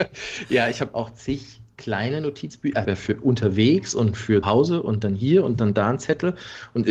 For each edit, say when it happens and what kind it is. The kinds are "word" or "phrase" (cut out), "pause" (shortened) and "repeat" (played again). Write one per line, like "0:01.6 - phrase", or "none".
0:02.8 - phrase
0:04.4 - word